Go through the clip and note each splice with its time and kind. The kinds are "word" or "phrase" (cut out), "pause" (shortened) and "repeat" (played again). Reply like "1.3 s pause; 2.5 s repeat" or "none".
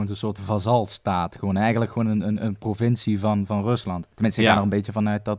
4.1 s pause